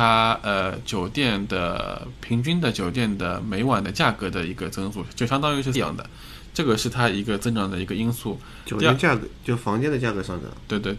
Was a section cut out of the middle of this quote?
yes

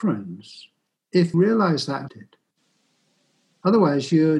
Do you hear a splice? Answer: yes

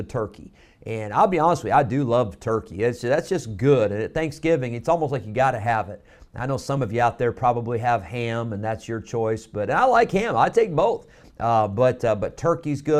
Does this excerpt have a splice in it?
no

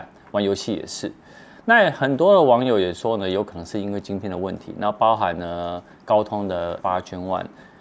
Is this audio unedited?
no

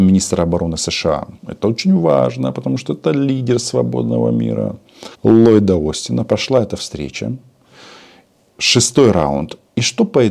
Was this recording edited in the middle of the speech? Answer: yes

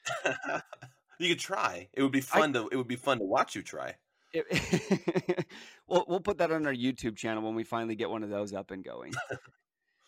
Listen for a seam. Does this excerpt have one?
no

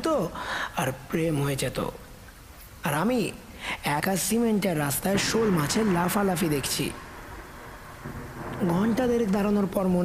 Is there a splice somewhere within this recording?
yes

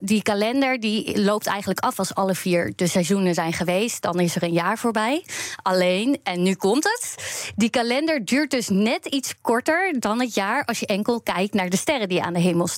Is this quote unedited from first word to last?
yes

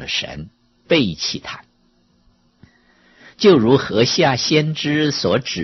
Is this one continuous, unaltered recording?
yes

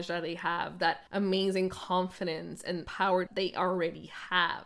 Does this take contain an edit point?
yes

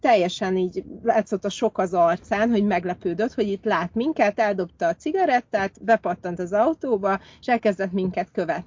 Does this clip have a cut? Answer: no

